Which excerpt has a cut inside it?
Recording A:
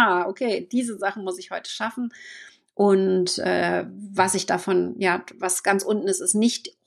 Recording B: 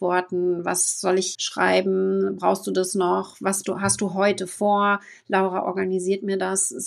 B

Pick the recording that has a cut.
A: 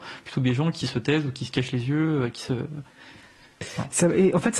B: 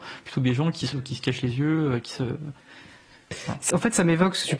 B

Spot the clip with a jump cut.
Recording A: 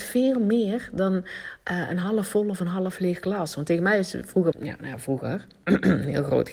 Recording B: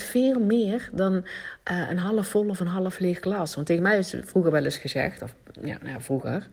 A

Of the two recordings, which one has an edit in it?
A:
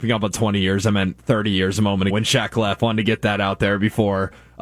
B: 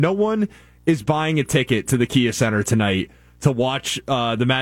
A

